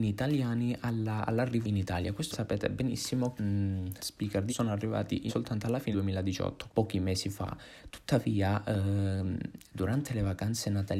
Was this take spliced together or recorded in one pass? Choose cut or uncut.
cut